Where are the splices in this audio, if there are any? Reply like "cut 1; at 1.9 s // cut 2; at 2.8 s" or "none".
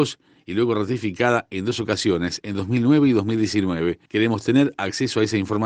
cut 1; at 4.1 s

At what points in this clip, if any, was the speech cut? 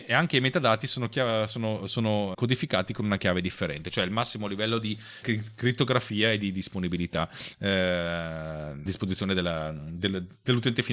cut 1; at 2.3 s // cut 2; at 5.2 s // cut 3; at 8.9 s

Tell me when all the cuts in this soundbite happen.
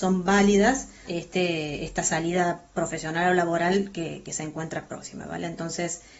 cut 1; at 1.1 s

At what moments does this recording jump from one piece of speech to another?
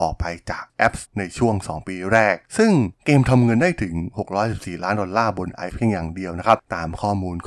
cut 1; at 1.0 s // cut 2; at 5.7 s

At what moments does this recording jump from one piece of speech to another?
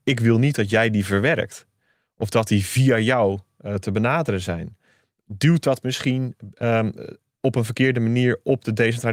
none

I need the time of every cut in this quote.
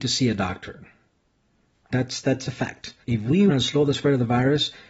cut 1; at 1.9 s // cut 2; at 3.0 s // cut 3; at 3.5 s

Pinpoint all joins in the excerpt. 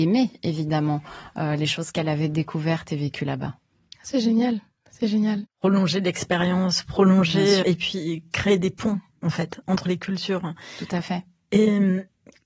cut 1; at 7.6 s

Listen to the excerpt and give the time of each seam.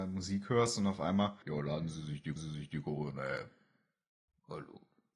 cut 1; at 1.4 s // cut 2; at 2.4 s

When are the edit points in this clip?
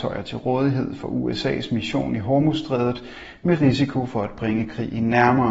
none

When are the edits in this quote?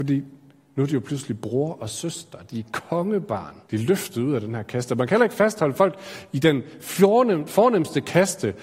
cut 1; at 3.6 s

